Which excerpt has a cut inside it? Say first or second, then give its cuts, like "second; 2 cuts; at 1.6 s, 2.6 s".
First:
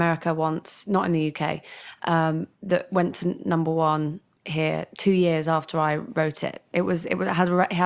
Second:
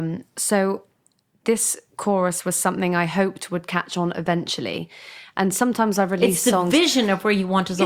first; 1 cut; at 2.5 s